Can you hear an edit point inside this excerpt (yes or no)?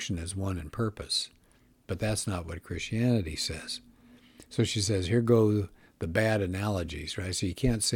no